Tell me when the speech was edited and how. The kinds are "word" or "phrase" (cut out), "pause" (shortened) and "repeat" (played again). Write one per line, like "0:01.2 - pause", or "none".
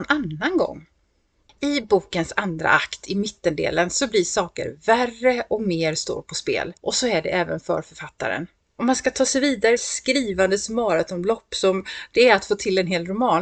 0:06.8 - pause
0:09.8 - word